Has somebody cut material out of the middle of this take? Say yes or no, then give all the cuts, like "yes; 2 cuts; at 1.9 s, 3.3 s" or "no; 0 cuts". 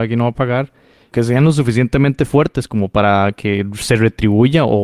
no; 0 cuts